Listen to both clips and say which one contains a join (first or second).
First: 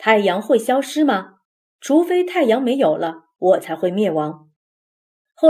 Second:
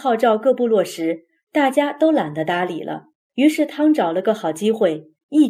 second